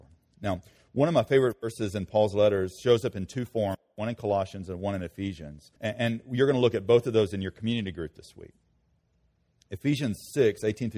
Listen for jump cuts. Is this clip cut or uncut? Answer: cut